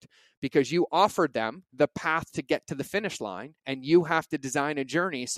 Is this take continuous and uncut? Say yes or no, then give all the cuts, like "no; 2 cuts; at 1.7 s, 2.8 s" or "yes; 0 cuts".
no; 2 cuts; at 1.7 s, 3.6 s